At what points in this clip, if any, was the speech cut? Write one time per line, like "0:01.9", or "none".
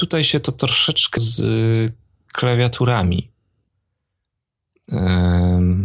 0:01.2